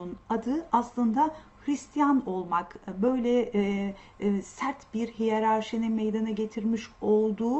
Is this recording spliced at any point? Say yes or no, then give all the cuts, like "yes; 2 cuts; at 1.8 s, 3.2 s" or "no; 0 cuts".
no; 0 cuts